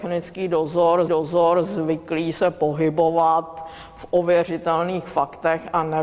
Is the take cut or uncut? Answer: cut